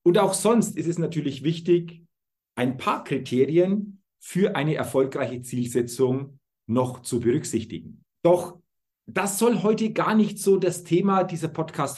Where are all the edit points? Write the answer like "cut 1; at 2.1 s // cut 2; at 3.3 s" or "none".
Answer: cut 1; at 8.2 s